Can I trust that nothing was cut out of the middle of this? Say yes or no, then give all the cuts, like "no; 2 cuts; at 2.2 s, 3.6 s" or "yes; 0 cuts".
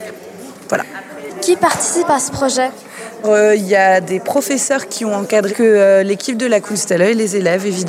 no; 2 cuts; at 3.2 s, 5.5 s